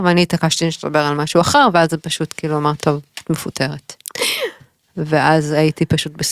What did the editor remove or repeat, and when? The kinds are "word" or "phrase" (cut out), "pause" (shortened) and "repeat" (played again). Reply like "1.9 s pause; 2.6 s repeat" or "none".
2.8 s word